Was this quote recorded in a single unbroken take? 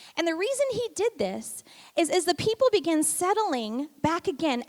yes; 0 cuts

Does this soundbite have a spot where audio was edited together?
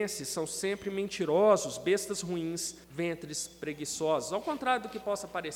yes; 1 cut; at 2.8 s

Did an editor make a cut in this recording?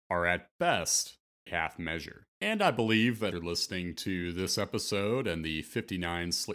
yes; 3 cuts; at 1.5 s, 2.3 s, 3.3 s

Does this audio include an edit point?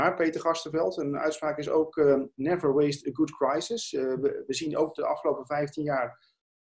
no; 0 cuts

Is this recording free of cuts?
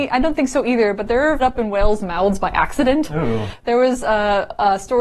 no; 1 cut; at 1.4 s

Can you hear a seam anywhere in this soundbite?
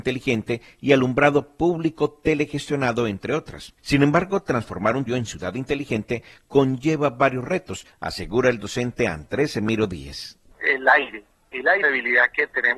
yes; 3 cuts; at 3.8 s, 5.1 s, 11.8 s

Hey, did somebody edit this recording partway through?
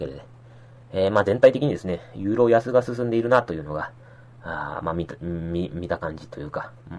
no; 0 cuts

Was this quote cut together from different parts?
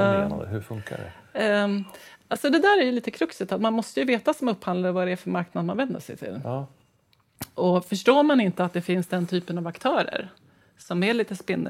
no; 0 cuts

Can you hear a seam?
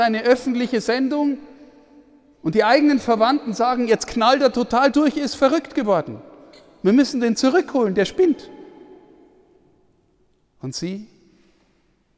no; 0 cuts

